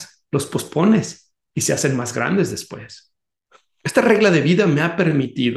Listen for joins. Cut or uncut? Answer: uncut